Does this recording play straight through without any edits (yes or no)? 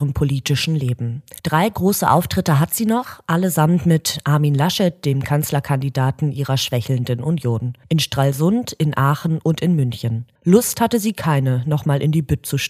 no